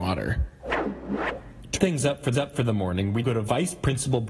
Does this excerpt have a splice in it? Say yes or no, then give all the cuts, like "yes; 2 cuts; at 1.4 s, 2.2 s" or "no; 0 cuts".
yes; 3 cuts; at 1.8 s, 2.3 s, 3.2 s